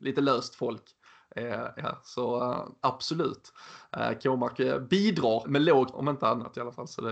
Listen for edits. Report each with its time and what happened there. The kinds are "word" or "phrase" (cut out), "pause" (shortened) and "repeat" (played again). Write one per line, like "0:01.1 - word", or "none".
0:01.8 - word
0:05.4 - word
0:05.9 - word